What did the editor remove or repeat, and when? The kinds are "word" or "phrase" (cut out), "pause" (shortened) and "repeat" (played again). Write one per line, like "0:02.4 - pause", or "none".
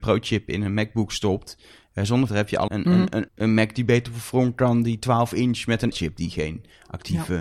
0:02.3 - word
0:02.7 - word
0:03.3 - word
0:05.9 - word